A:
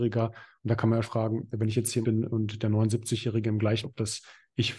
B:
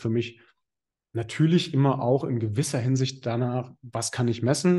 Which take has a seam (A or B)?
A